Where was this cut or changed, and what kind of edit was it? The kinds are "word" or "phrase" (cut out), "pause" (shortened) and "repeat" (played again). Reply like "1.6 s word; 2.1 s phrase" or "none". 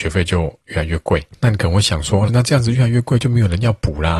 2.3 s phrase